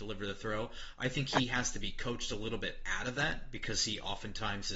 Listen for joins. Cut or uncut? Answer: uncut